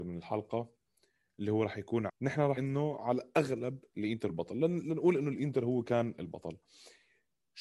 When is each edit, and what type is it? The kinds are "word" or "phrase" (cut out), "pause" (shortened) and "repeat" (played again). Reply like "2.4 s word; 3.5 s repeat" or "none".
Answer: 2.1 s word; 2.6 s word; 4.3 s word